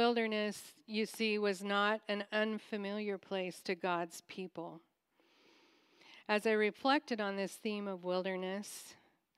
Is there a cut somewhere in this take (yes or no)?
no